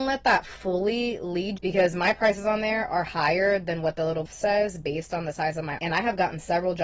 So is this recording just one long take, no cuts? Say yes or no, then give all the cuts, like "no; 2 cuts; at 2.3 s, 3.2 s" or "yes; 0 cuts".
no; 3 cuts; at 1.6 s, 4.3 s, 5.8 s